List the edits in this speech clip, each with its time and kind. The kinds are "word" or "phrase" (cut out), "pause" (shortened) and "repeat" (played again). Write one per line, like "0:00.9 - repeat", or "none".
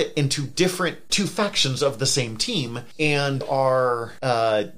0:01.1 - word
0:03.4 - word